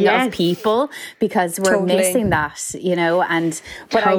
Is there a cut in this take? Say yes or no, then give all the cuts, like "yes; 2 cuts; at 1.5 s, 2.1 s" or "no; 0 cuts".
no; 0 cuts